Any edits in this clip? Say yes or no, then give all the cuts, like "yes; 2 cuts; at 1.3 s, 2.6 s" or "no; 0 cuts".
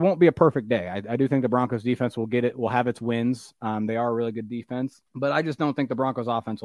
yes; 1 cut; at 5.1 s